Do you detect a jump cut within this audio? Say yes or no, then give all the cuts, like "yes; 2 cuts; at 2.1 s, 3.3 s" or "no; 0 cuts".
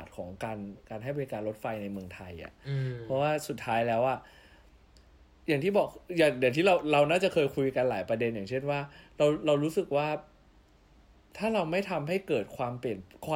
no; 0 cuts